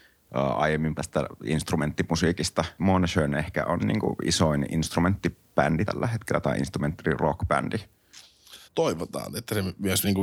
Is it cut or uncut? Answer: cut